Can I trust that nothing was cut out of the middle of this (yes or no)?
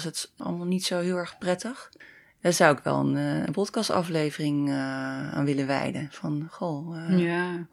yes